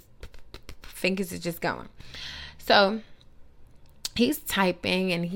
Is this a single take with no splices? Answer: yes; 0 cuts

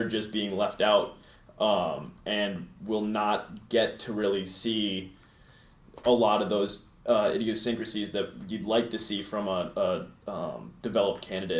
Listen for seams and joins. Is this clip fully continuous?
yes; 0 cuts

